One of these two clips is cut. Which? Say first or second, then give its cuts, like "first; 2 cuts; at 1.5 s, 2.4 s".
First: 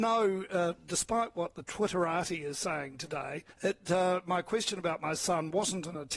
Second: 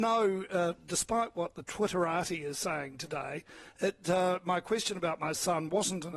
first; 1 cut; at 3.5 s